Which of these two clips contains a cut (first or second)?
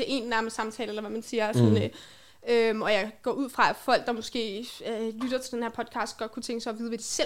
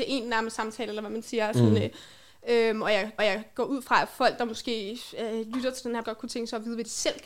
second